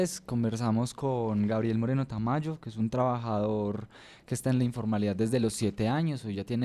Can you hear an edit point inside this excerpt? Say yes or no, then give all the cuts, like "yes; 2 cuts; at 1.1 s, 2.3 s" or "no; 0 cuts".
no; 0 cuts